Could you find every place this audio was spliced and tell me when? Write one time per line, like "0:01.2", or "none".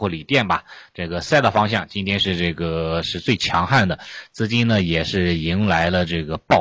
none